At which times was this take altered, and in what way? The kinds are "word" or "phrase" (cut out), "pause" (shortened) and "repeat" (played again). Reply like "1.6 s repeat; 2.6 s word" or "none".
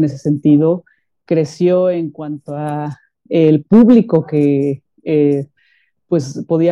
none